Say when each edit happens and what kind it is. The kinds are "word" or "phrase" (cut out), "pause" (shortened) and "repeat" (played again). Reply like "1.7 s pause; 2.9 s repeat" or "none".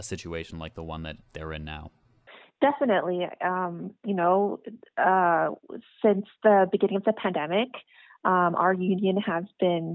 1.2 s pause; 2.3 s pause